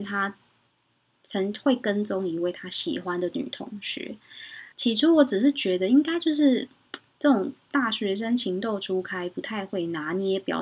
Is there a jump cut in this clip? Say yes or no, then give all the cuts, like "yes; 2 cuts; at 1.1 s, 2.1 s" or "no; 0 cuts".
yes; 1 cut; at 4.7 s